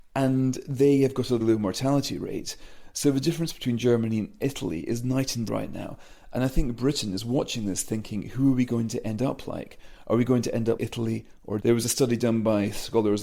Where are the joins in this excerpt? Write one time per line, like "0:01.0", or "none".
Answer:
0:01.4
0:05.5
0:10.8
0:11.6